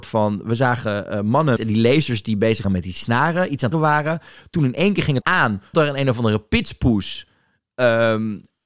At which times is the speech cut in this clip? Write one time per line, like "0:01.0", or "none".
0:01.6
0:02.6
0:03.7
0:05.2
0:05.7